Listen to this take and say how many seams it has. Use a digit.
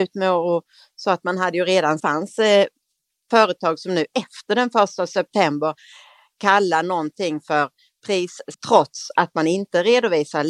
2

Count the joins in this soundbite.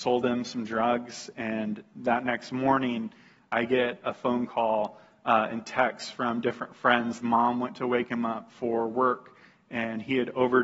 1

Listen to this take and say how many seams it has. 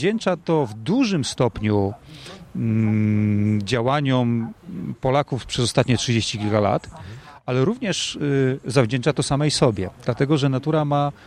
0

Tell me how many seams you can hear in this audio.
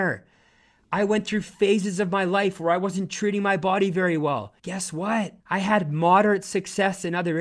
2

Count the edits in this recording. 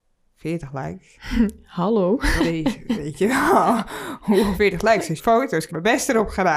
4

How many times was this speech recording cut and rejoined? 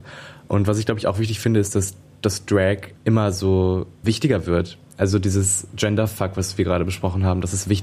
2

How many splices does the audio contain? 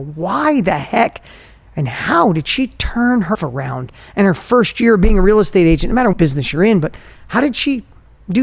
2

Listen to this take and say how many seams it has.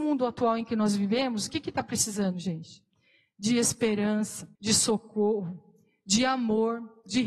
1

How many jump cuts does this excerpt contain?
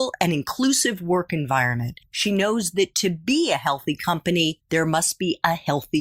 0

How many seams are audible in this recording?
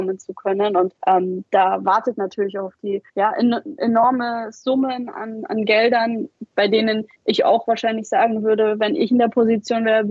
3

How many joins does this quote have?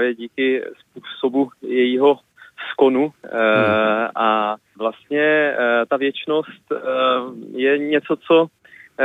1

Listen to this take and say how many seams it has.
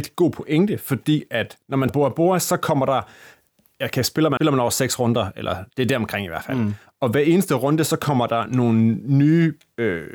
2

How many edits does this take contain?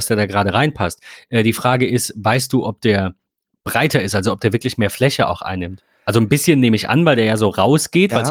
0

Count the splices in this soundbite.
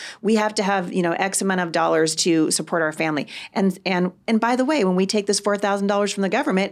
0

